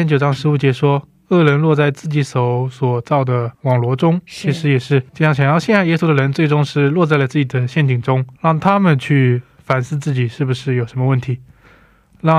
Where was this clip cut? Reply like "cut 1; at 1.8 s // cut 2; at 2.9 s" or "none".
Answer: cut 1; at 3.5 s // cut 2; at 5.1 s // cut 3; at 8.4 s